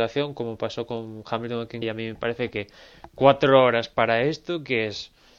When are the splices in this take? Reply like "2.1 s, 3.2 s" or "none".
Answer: 1.8 s